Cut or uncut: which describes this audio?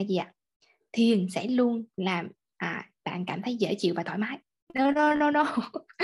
cut